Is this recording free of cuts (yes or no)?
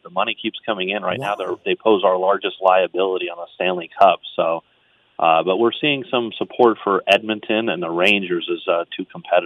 yes